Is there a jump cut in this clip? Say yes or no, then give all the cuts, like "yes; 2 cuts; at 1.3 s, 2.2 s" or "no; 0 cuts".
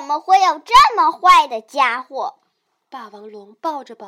no; 0 cuts